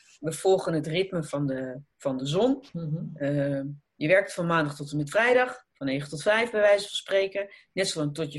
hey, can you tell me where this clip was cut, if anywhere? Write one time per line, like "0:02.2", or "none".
0:01.9
0:02.7
0:03.8
0:05.7

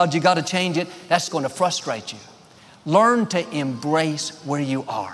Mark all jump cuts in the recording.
0:01.3

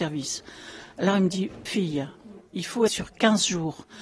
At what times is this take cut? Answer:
0:01.7
0:02.9

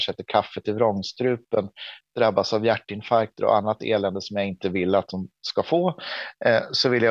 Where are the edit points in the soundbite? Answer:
none

